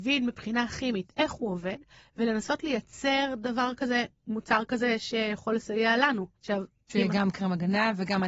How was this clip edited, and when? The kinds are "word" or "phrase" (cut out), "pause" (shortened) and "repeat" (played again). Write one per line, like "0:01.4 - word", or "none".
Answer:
0:06.4 - pause